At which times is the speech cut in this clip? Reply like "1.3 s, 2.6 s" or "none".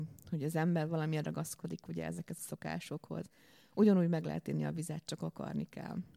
2.4 s